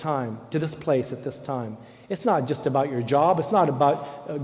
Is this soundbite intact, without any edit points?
yes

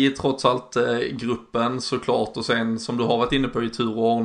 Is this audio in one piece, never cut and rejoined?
yes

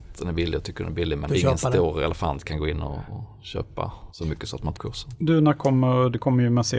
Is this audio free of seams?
no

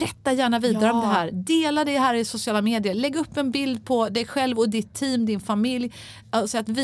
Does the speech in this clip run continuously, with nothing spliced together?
yes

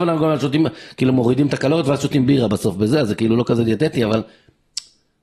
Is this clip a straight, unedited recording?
yes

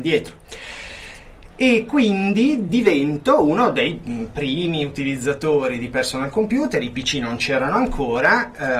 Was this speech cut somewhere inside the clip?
no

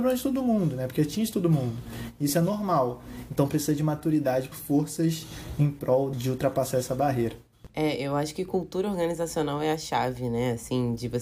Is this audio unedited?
no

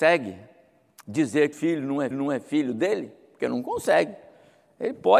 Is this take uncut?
no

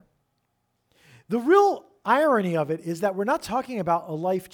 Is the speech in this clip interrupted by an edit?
no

